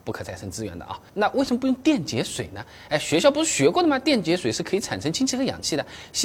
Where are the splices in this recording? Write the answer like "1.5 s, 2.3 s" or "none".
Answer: 1.1 s